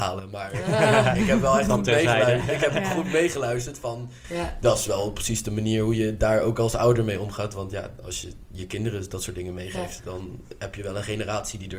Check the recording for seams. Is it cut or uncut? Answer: uncut